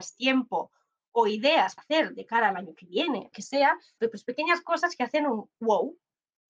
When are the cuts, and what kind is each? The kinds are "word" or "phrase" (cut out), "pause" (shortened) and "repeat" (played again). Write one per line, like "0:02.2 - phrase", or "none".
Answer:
0:01.8 - word
0:03.3 - word
0:04.0 - word